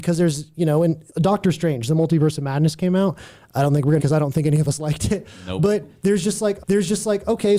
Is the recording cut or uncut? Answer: cut